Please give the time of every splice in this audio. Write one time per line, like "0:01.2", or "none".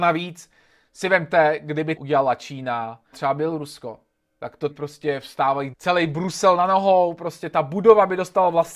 0:02.0
0:03.1
0:04.7
0:05.7